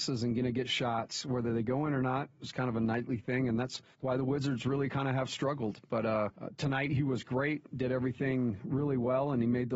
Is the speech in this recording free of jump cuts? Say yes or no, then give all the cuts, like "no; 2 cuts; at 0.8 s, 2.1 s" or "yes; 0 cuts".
no; 2 cuts; at 3.9 s, 6.3 s